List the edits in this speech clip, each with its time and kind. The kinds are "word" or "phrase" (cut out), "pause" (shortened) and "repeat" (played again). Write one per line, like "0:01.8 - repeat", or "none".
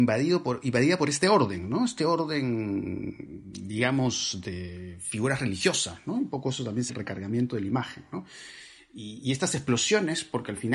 0:06.9 - phrase